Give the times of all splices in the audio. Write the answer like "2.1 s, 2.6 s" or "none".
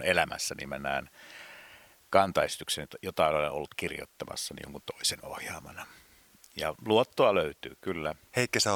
none